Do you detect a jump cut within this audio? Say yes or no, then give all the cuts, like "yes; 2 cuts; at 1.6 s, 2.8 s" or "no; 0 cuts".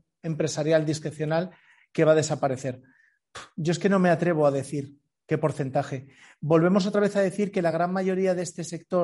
no; 0 cuts